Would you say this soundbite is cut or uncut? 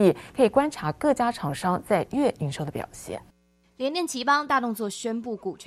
cut